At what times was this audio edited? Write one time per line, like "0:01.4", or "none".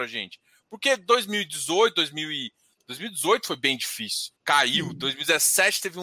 0:04.4